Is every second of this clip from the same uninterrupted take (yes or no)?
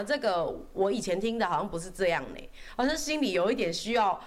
yes